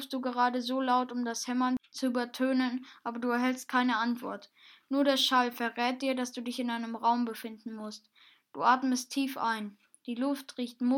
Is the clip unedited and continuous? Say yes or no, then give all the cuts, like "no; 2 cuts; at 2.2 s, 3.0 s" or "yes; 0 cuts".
yes; 0 cuts